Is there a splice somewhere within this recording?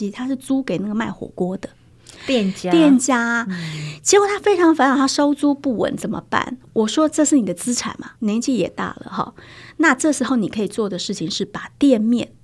yes; 1 cut; at 8.2 s

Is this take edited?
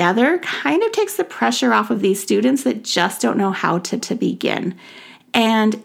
yes; 1 cut; at 4.0 s

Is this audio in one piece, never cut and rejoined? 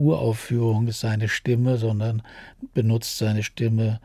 yes; 0 cuts

